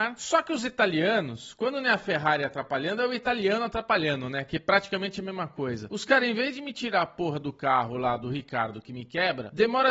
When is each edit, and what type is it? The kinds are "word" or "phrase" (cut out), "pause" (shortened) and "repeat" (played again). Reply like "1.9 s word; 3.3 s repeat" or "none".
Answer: none